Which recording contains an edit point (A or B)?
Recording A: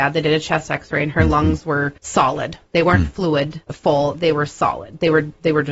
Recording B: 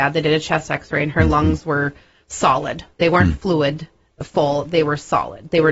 A